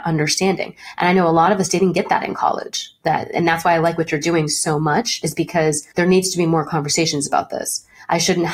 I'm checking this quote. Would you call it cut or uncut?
cut